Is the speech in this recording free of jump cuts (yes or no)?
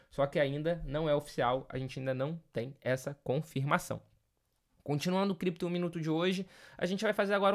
yes